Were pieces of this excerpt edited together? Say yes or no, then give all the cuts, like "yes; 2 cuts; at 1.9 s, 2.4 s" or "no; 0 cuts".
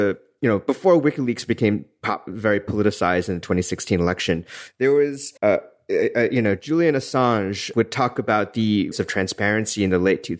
yes; 4 cuts; at 2.3 s, 5.4 s, 7.7 s, 8.9 s